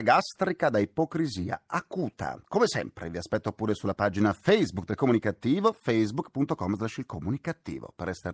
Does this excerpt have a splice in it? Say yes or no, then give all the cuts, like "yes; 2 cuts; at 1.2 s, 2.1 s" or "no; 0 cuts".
no; 0 cuts